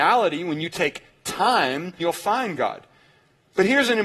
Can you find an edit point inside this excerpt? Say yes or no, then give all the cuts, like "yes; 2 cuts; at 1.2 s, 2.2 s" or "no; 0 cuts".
yes; 1 cut; at 2.0 s